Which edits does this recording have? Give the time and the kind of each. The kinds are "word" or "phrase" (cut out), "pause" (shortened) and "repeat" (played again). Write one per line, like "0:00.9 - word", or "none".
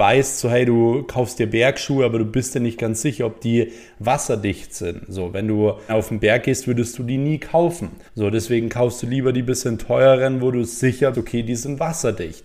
0:05.9 - word
0:08.1 - pause
0:11.1 - word